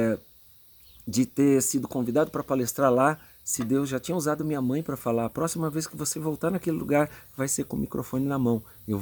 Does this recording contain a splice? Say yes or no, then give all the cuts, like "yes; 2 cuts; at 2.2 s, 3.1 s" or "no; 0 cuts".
no; 0 cuts